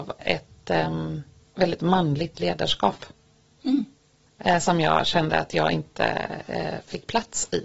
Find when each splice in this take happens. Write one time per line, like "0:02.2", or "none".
none